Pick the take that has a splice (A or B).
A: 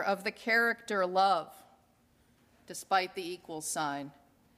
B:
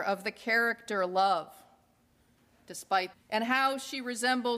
B